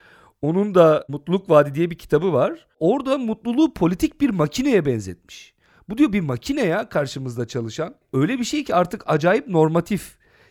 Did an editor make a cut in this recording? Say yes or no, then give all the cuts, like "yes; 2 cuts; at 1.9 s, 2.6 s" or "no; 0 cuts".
no; 0 cuts